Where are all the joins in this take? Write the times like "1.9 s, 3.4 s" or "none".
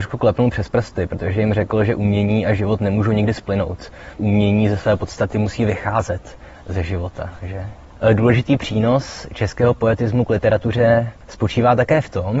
4.2 s